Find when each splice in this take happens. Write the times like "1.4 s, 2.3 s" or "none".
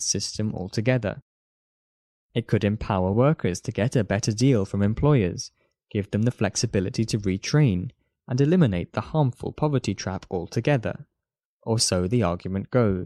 none